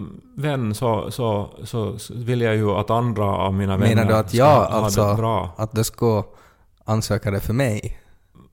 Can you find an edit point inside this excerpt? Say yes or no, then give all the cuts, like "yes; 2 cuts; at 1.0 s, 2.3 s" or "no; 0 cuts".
no; 0 cuts